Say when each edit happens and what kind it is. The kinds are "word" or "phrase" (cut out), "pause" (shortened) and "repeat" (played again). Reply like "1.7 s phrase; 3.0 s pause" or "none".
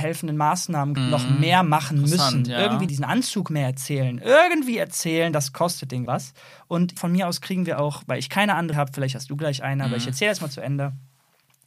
1.0 s word; 2.9 s word; 6.1 s word; 7.0 s word; 8.7 s word